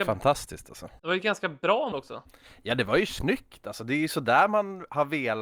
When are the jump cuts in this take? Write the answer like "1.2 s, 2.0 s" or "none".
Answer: 1.0 s, 1.9 s

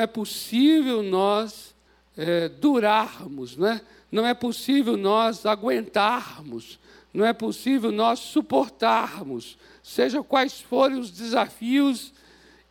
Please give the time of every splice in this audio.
1.9 s

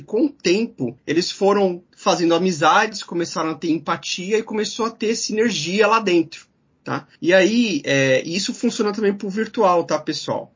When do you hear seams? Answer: 1.0 s, 7.2 s

